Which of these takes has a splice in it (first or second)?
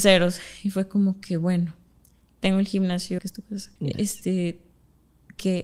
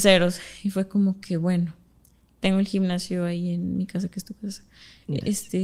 first